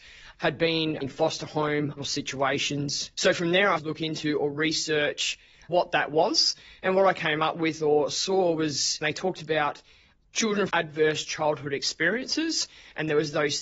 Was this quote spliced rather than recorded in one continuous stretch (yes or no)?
yes